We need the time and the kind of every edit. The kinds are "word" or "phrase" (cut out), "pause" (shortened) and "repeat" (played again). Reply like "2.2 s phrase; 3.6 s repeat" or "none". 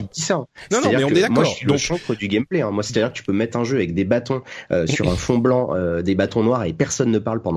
none